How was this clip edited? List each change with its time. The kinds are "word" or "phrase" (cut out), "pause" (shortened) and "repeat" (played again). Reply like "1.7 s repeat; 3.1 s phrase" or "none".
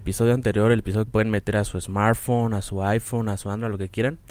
1.1 s phrase